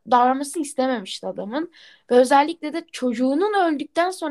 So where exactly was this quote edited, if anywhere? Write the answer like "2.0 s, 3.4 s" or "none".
none